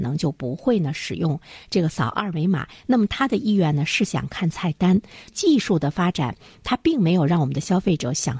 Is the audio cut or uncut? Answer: uncut